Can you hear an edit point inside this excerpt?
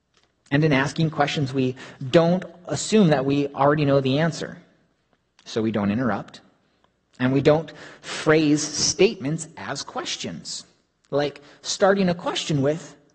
no; 0 cuts

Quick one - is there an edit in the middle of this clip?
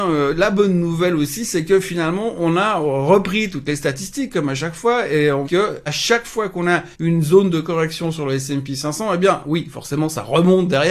yes; 3 cuts; at 5.4 s, 5.9 s, 6.9 s

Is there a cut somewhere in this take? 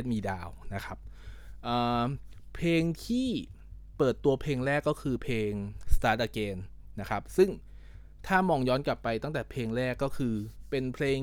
no; 0 cuts

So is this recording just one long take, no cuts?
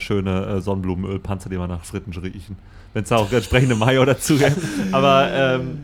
yes; 0 cuts

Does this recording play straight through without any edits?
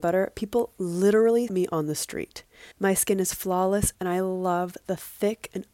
no; 3 cuts; at 1.5 s, 2.7 s, 3.9 s

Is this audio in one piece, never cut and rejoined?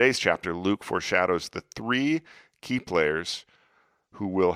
yes; 0 cuts

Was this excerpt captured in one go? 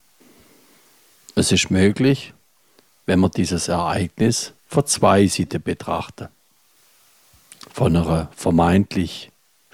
no; 1 cut; at 4.6 s

